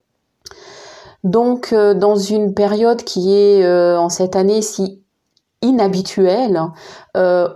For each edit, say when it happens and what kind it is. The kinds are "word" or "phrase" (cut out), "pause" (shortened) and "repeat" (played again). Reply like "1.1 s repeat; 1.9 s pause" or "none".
none